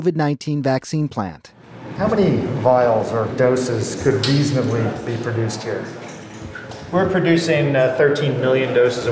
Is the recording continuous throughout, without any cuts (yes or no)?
yes